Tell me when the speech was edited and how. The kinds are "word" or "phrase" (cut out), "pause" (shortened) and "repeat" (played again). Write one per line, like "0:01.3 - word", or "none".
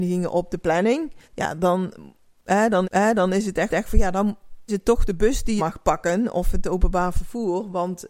0:01.2 - pause
0:02.8 - repeat
0:03.7 - repeat
0:04.7 - word
0:05.6 - phrase